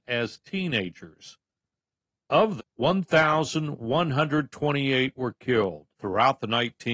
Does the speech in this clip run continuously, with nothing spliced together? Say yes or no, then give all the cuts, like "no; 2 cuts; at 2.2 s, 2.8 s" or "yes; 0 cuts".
no; 2 cuts; at 2.6 s, 5.9 s